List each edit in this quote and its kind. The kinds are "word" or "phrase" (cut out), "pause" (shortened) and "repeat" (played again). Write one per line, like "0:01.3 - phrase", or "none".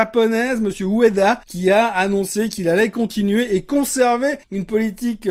none